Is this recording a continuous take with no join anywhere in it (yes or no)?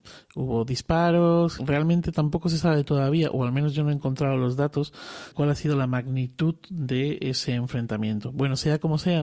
no